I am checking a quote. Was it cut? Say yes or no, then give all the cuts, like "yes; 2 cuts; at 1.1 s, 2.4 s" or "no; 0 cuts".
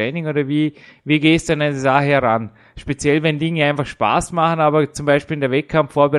no; 0 cuts